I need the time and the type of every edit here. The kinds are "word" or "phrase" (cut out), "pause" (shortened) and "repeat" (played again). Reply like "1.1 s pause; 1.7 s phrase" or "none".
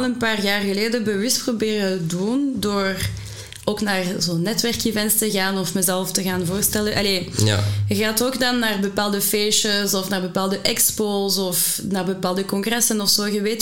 none

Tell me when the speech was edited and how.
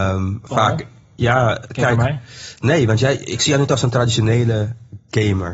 none

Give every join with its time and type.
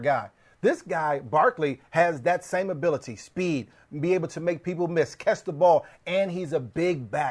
none

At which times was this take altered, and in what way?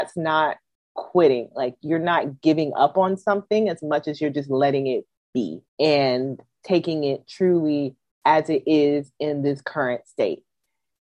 5.7 s pause

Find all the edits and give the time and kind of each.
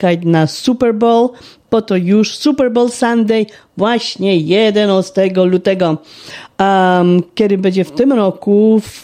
none

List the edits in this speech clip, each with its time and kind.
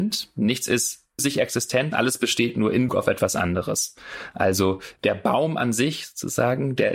1.2 s word; 1.9 s word; 2.9 s word

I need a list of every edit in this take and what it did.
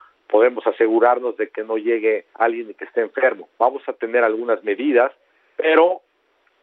2.3 s pause

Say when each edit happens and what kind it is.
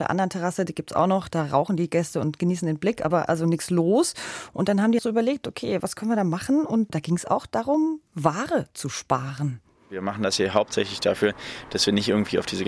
3.1 s word; 5.0 s word

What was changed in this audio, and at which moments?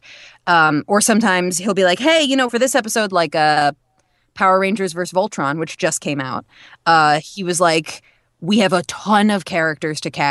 none

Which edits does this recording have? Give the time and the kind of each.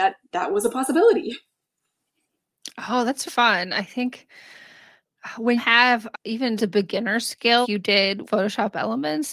3.3 s word; 5.6 s word; 6.1 s word; 6.6 s word; 7.6 s word; 8.2 s word

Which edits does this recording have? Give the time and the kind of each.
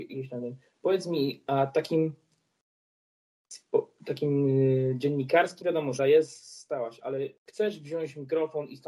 5.6 s word; 6.0 s word; 7.4 s pause

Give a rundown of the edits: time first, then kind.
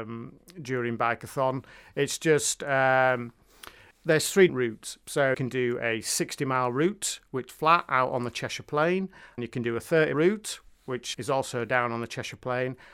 3.9 s word; 4.5 s word; 5.3 s word; 7.5 s word; 9.4 s word; 10.1 s word; 11.1 s word

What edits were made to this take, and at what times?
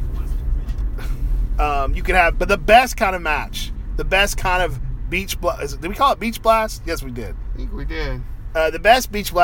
2.3 s word

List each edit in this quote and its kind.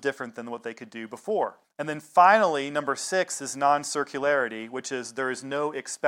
1.6 s pause

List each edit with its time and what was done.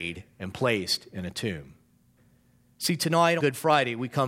2.2 s pause; 3.4 s word

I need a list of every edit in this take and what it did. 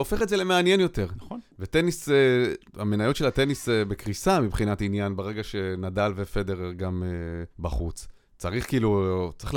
2.7 s pause; 7.5 s pause

